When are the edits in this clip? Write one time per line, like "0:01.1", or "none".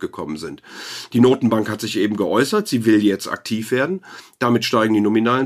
none